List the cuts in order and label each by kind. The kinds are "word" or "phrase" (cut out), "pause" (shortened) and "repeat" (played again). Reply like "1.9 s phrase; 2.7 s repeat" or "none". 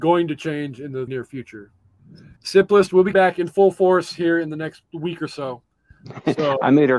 1.1 s word; 2.4 s pause; 3.1 s word; 4.9 s pause